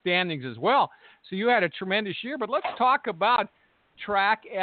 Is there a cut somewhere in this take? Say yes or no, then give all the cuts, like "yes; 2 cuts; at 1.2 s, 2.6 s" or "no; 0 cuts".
no; 0 cuts